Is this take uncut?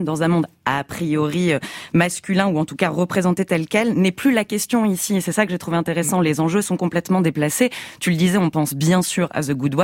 yes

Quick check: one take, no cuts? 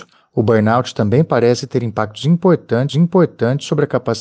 no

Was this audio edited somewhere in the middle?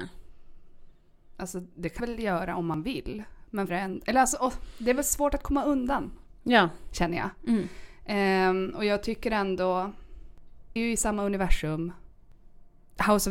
yes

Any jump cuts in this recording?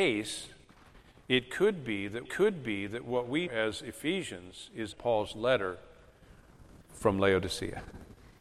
yes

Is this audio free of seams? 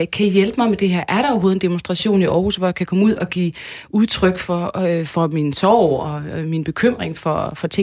yes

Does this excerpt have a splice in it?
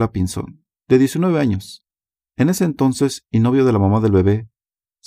no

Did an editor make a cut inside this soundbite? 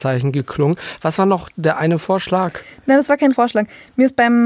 yes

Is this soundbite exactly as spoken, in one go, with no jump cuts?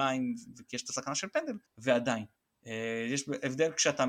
no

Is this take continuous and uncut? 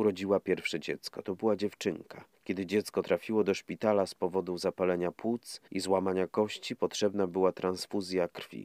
no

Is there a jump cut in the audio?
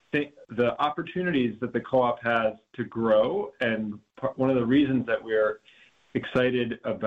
no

